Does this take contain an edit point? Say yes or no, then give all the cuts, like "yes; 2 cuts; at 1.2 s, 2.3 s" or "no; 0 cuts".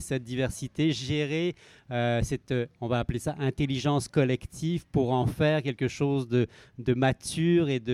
no; 0 cuts